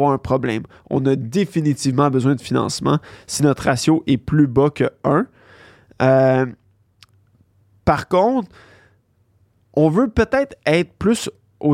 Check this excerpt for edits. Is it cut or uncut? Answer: uncut